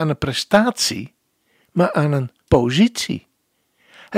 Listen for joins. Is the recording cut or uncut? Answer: cut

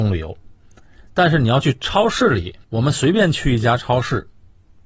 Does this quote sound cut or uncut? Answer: cut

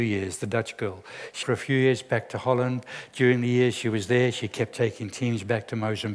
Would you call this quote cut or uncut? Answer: cut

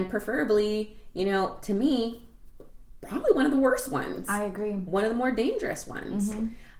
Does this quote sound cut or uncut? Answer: uncut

